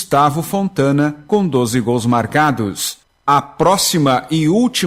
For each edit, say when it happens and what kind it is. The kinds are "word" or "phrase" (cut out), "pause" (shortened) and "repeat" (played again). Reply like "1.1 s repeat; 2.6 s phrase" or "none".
none